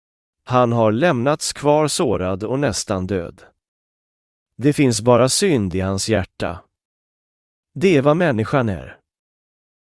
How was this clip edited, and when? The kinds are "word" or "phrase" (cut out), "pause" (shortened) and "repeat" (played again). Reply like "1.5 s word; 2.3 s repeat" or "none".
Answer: none